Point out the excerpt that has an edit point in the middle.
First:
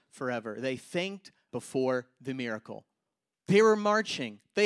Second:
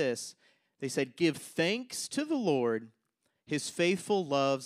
first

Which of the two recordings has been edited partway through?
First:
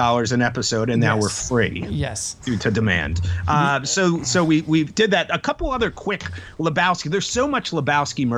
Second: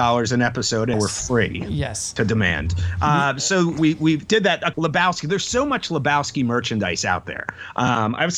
second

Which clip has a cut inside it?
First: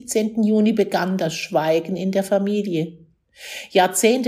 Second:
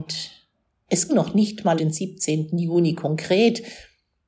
second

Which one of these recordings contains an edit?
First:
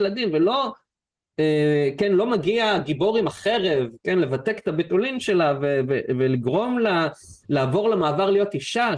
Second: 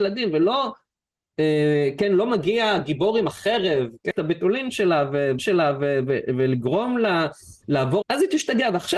second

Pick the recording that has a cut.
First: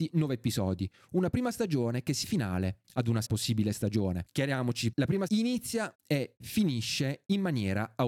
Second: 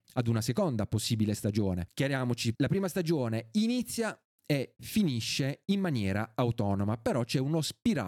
first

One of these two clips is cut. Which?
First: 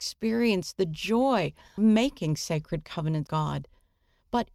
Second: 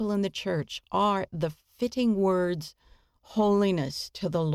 first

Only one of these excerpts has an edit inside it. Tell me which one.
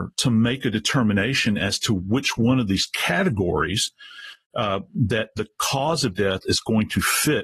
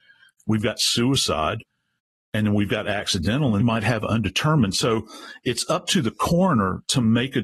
second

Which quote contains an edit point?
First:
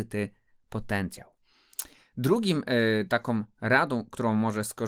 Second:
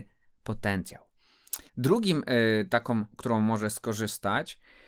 second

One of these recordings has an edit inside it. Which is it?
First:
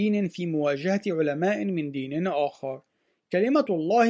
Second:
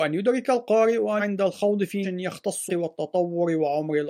second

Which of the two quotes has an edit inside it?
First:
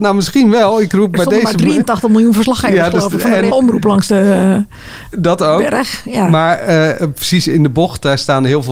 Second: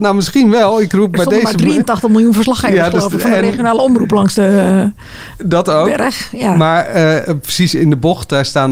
first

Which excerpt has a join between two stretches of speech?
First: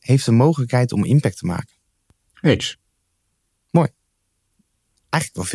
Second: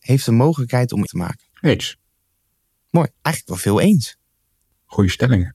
second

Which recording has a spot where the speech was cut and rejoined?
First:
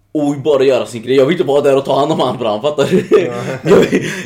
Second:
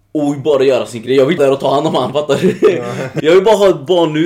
second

